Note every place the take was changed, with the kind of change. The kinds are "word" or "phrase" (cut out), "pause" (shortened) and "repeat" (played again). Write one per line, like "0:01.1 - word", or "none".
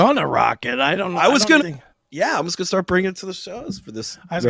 0:01.6 - word
0:01.9 - pause